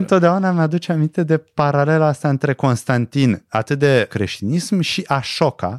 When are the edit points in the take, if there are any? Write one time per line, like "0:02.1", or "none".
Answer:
0:04.1